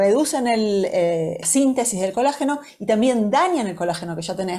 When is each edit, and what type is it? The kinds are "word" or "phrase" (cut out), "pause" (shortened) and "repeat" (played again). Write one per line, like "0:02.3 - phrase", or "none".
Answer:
0:01.4 - phrase